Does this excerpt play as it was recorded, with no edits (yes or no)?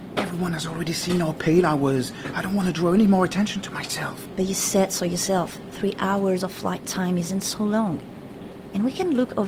yes